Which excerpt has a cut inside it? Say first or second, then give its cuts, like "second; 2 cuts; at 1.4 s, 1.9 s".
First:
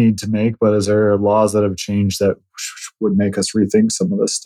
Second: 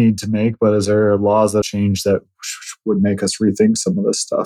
second; 1 cut; at 1.6 s